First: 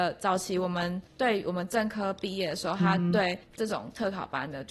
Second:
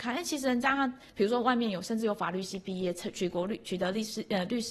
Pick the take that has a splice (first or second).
first